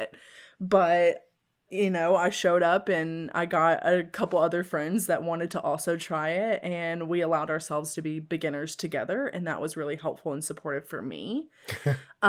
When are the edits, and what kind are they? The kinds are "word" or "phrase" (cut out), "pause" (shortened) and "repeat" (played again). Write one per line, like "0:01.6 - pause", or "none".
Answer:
none